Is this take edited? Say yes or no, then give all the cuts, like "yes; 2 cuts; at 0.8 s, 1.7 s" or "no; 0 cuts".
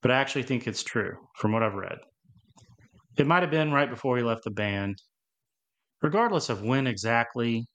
no; 0 cuts